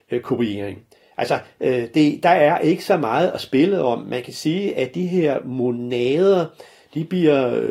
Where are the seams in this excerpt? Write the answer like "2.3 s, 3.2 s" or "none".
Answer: none